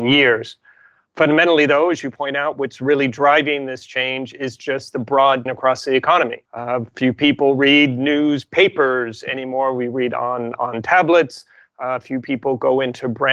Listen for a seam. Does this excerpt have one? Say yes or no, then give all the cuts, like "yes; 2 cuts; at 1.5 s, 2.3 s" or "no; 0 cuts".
yes; 2 cuts; at 5.5 s, 6.4 s